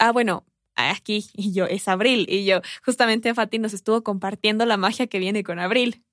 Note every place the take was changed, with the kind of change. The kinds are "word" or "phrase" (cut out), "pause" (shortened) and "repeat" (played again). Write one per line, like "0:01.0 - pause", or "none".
none